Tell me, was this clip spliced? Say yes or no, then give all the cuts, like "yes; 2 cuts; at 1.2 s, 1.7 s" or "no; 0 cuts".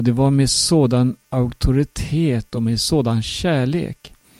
no; 0 cuts